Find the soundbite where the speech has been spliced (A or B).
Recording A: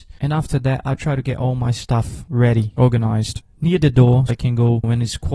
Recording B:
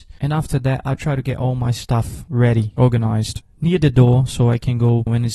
A